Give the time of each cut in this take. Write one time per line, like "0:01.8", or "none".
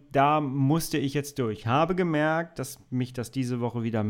0:01.6